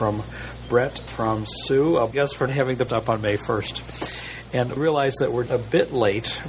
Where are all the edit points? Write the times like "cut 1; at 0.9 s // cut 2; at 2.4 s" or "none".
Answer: cut 1; at 1.1 s // cut 2; at 2.1 s // cut 3; at 2.5 s // cut 4; at 2.9 s // cut 5; at 4.8 s // cut 6; at 5.5 s